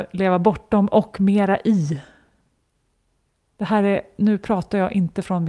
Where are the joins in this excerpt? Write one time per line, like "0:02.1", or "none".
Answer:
none